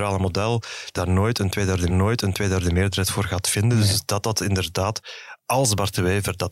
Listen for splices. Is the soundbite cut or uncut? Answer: cut